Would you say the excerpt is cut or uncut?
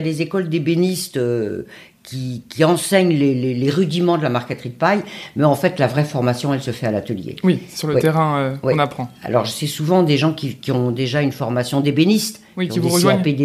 uncut